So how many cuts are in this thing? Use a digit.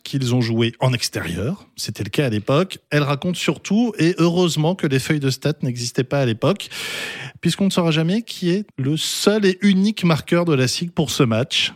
1